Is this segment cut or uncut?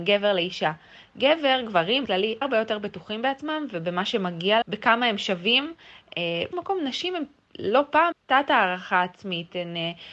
cut